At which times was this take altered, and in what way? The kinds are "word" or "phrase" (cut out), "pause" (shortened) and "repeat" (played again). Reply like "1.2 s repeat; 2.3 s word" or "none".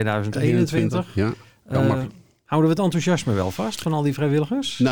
none